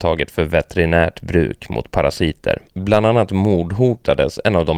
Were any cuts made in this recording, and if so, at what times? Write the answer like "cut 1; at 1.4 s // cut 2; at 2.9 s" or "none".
cut 1; at 2.7 s